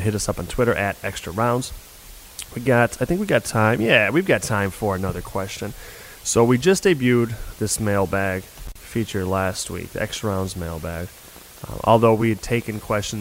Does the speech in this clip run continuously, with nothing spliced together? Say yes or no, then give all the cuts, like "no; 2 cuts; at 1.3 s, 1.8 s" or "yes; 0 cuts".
yes; 0 cuts